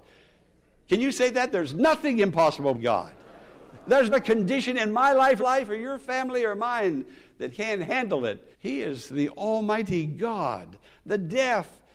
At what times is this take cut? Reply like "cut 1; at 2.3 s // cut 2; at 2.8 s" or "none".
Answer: cut 1; at 2.7 s // cut 2; at 3.2 s // cut 3; at 4.1 s // cut 4; at 5.4 s // cut 5; at 7.5 s // cut 6; at 8.5 s